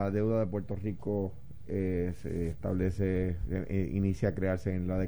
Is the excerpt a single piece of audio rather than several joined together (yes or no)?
yes